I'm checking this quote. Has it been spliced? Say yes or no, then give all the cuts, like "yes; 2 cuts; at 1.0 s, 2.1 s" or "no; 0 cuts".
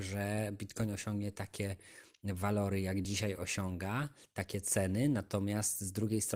no; 0 cuts